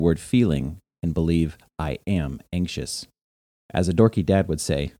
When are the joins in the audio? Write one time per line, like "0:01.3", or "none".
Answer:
none